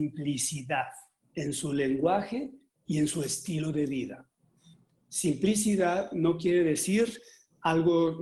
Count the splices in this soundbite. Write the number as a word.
zero